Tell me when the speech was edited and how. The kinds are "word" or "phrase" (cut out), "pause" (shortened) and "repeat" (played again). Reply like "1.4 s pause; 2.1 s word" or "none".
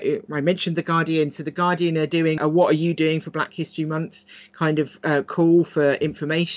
2.4 s word